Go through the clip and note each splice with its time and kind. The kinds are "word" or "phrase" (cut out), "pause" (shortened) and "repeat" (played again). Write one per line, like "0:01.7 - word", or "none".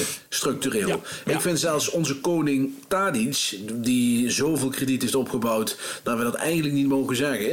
none